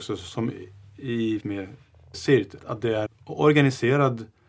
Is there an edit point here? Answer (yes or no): yes